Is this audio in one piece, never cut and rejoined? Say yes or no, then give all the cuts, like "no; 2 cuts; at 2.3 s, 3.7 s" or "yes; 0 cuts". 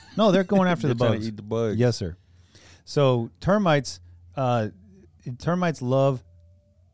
yes; 0 cuts